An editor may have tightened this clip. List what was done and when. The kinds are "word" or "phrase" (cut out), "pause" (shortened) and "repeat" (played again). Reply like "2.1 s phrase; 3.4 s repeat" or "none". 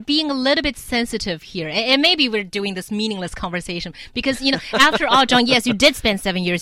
none

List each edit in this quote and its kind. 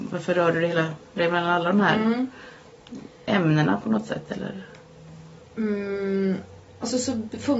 1.2 s word; 3.2 s pause; 5.4 s pause

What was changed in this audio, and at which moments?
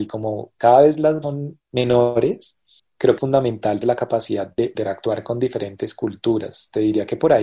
1.2 s word; 1.7 s word; 3.2 s word; 3.8 s word

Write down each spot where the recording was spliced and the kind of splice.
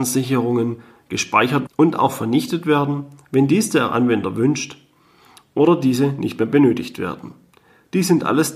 1.7 s word

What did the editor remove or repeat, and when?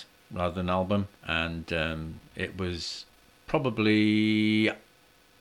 1.2 s pause

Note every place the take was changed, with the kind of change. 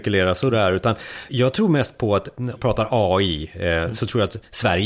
1.3 s word; 2.6 s phrase

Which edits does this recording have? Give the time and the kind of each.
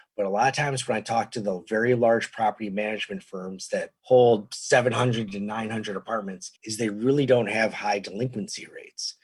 4.0 s pause; 6.6 s pause

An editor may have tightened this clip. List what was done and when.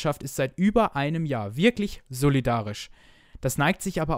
2.1 s word

